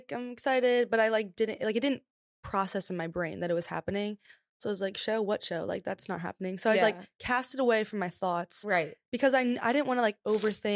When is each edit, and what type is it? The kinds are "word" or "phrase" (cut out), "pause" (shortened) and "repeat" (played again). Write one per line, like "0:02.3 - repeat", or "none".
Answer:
none